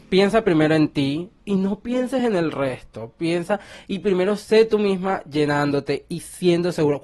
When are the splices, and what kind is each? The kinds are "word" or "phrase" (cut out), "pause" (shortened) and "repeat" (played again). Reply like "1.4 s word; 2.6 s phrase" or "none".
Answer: none